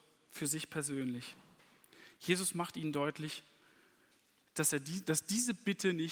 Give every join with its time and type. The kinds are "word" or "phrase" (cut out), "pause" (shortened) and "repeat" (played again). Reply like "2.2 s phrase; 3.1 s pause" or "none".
none